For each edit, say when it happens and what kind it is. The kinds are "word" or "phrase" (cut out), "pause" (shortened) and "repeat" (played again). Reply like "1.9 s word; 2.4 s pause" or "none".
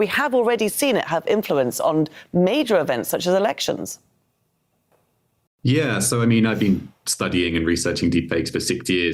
none

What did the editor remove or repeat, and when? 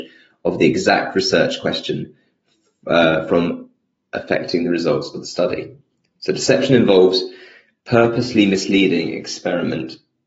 none

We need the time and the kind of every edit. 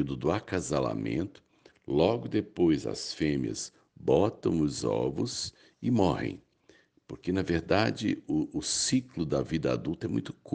none

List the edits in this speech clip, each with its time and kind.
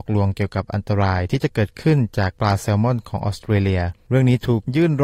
4.0 s pause

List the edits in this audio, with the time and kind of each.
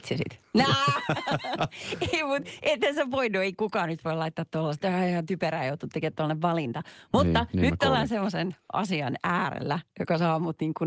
none

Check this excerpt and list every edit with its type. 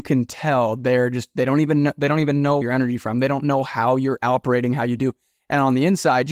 2.6 s phrase

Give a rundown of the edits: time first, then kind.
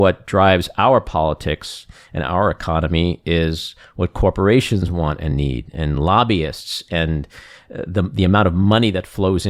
none

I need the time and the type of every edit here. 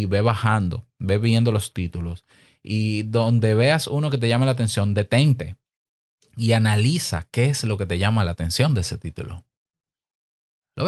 none

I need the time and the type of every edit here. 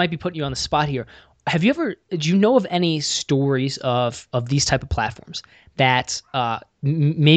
none

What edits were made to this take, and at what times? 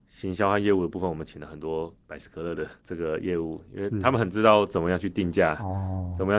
2.8 s pause

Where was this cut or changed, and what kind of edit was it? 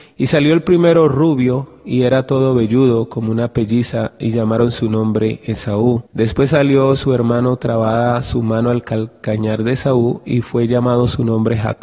6.1 s pause

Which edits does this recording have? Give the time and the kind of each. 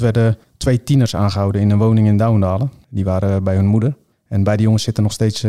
none

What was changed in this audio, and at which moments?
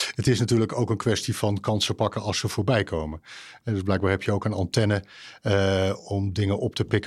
none

